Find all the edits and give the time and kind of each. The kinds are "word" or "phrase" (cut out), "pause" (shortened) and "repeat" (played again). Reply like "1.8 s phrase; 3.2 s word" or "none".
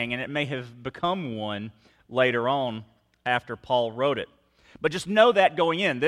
none